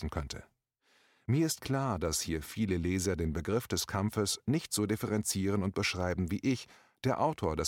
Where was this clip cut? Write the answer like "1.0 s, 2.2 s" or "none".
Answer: none